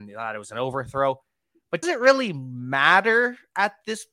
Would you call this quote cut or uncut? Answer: cut